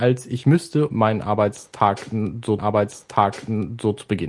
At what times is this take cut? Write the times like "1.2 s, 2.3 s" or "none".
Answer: 0.9 s, 2.6 s